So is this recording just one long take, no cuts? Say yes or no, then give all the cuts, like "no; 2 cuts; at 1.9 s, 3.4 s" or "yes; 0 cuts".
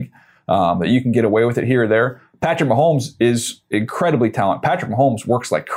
yes; 0 cuts